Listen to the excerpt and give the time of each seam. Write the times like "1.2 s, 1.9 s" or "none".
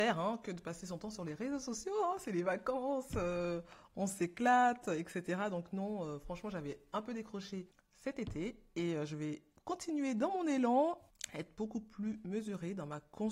none